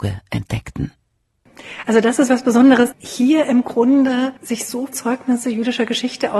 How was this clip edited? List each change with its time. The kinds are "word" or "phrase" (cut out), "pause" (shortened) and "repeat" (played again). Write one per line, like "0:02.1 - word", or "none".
0:02.3 - word
0:02.9 - word
0:04.4 - pause
0:04.9 - word